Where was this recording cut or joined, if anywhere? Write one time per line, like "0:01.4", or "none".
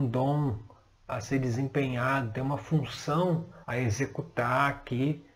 0:03.6